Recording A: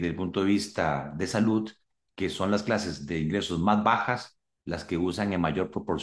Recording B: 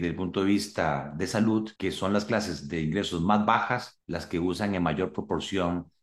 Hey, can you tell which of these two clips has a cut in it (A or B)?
B